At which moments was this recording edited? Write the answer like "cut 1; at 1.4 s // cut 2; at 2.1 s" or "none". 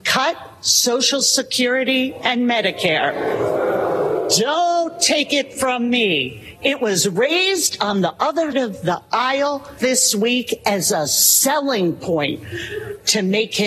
cut 1; at 8.5 s // cut 2; at 9.8 s